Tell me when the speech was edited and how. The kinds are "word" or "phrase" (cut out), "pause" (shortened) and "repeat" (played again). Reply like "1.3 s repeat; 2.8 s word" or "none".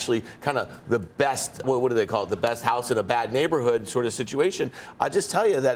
1.6 s word